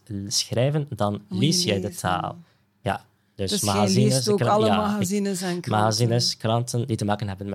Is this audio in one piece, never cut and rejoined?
yes; 0 cuts

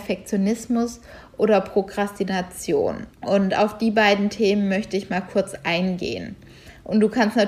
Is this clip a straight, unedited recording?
no; 1 cut; at 3.1 s

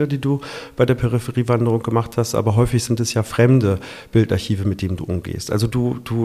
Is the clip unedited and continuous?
yes; 0 cuts

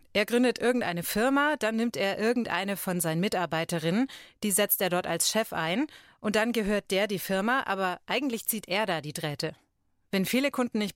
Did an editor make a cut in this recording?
no; 0 cuts

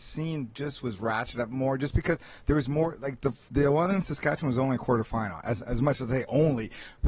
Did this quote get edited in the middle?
no; 0 cuts

